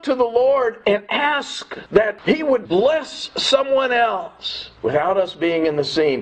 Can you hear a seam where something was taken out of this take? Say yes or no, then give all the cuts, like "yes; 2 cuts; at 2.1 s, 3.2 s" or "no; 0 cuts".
yes; 2 cuts; at 2.6 s, 4.8 s